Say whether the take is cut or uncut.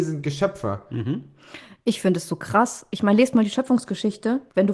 uncut